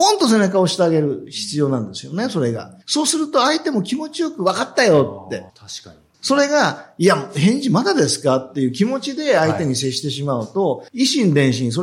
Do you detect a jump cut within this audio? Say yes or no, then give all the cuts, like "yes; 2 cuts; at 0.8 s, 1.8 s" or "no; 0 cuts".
yes; 4 cuts; at 2.8 s, 5.5 s, 6.1 s, 10.9 s